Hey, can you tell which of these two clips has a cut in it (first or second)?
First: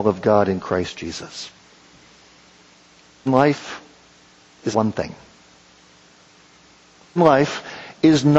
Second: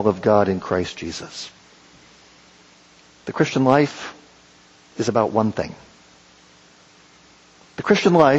first